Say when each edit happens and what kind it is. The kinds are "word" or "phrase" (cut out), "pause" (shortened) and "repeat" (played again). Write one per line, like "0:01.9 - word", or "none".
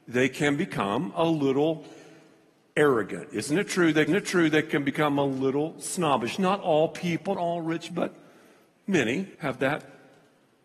0:04.1 - repeat
0:07.4 - word
0:07.9 - word
0:09.3 - pause